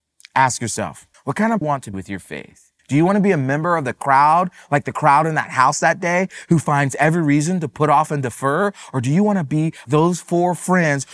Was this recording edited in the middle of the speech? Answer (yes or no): yes